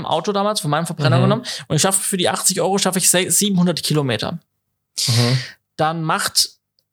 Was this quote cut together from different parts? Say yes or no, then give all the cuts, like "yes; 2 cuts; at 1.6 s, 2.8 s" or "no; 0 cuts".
no; 0 cuts